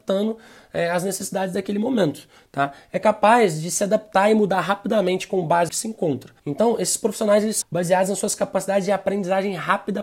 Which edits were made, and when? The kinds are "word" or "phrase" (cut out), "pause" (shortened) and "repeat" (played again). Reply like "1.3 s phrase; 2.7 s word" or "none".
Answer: 5.7 s phrase; 6.4 s pause; 7.6 s word